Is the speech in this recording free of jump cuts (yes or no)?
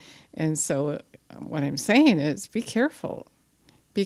yes